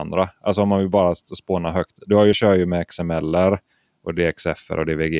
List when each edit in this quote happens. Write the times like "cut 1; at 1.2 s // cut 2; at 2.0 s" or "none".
cut 1; at 2.3 s